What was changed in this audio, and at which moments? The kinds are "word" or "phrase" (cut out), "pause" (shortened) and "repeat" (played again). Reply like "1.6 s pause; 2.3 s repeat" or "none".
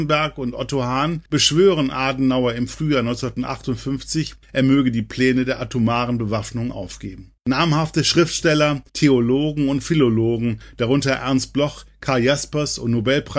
1.3 s pause; 4.4 s pause; 7.4 s pause; 8.9 s pause